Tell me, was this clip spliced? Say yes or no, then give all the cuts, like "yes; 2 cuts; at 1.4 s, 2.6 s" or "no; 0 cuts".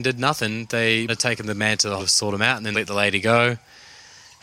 yes; 3 cuts; at 1.1 s, 2.0 s, 2.7 s